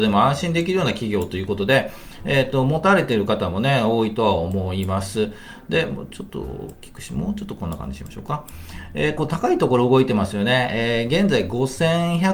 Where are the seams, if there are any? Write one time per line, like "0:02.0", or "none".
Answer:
0:09.2